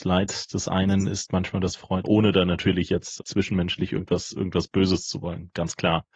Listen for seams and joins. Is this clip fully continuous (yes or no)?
no